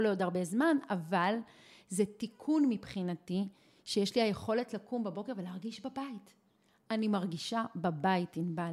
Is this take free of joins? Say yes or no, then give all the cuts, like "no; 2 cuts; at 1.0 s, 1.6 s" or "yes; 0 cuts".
yes; 0 cuts